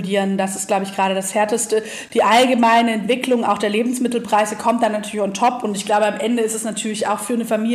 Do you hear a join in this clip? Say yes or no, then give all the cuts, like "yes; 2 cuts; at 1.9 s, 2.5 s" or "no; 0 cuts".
no; 0 cuts